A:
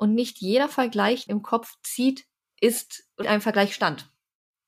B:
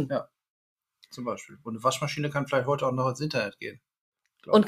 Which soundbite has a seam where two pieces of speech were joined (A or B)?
A